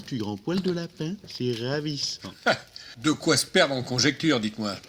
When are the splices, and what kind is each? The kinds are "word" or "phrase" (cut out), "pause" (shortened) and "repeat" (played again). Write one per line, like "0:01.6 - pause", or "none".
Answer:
none